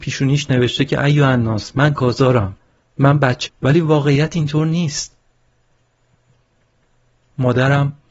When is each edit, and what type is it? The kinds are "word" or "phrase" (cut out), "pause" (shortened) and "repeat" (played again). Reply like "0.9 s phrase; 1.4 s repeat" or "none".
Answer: 2.0 s word; 3.5 s word